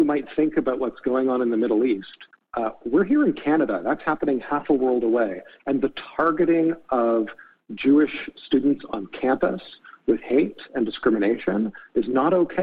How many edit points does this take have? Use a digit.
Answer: 0